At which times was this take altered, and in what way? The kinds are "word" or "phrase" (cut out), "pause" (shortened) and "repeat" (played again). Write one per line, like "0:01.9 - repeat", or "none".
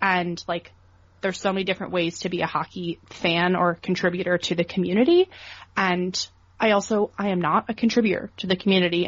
none